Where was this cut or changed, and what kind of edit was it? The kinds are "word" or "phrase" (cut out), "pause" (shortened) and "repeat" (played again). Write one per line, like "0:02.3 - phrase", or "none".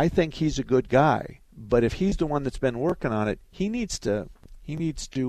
0:01.4 - pause